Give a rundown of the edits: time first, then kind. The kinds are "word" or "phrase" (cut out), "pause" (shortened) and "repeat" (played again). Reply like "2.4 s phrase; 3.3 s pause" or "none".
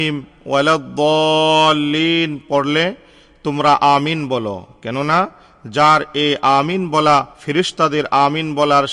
7.3 s pause